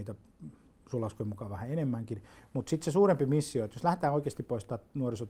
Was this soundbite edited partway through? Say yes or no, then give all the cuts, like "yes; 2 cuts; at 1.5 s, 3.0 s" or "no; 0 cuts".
no; 0 cuts